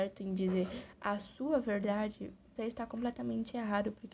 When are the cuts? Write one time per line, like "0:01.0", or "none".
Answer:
0:02.6